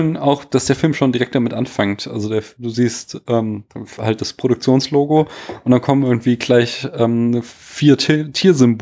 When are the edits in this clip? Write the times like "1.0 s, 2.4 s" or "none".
none

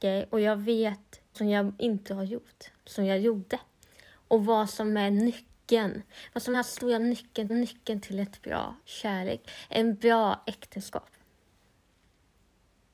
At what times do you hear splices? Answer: 1.3 s, 2.1 s, 2.8 s, 6.5 s, 7.5 s, 8.8 s

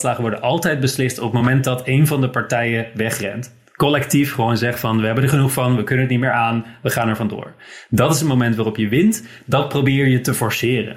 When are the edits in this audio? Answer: none

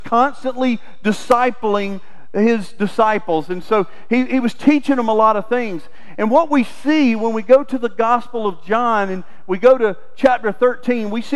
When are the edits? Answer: none

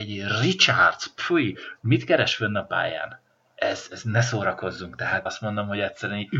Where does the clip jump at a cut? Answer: 3.9 s, 5.3 s

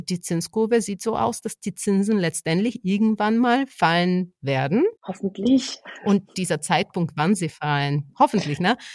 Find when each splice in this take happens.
5.0 s

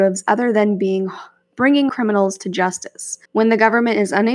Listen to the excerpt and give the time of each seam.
1.9 s, 3.3 s

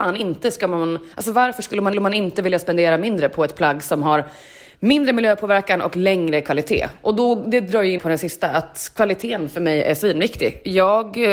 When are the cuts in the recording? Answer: 1.1 s, 1.9 s, 8.0 s

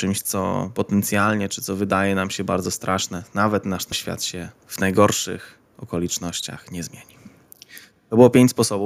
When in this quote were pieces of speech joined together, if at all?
3.9 s

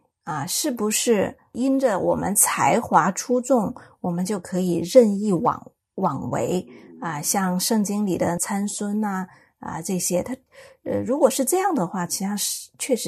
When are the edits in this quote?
none

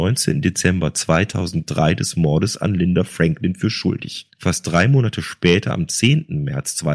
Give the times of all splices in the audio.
4.3 s

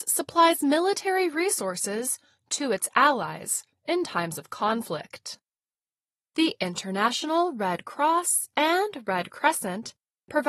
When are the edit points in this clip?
none

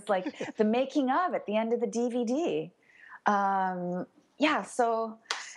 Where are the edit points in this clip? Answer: none

